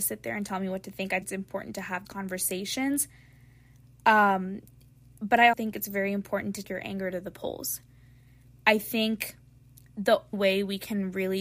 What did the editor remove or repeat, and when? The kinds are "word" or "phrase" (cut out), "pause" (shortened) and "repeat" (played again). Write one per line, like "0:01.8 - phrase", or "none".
0:01.2 - word
0:02.0 - word
0:05.5 - word
0:06.6 - word
0:10.3 - word